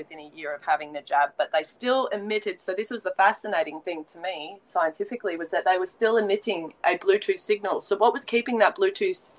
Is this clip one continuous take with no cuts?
yes; 0 cuts

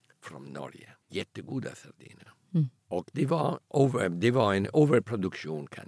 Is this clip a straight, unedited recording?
no; 2 cuts; at 1.0 s, 2.8 s

